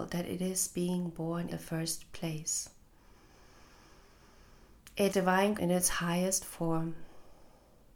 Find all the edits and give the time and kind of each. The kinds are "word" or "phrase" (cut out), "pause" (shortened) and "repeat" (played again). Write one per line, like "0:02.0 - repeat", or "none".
0:01.5 - word
0:05.1 - word
0:05.6 - word